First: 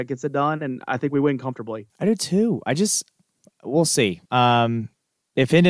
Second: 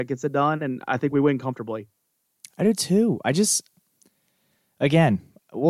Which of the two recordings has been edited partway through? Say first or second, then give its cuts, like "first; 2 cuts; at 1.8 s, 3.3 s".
first; 3 cuts; at 1.9 s, 3.4 s, 4.3 s